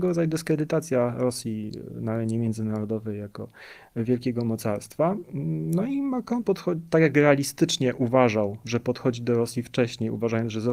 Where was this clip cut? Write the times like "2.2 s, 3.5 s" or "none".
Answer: 6.4 s